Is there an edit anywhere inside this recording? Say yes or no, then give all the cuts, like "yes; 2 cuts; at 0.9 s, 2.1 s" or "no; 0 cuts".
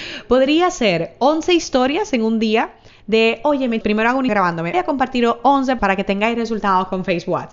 yes; 4 cuts; at 3.8 s, 4.3 s, 4.7 s, 5.8 s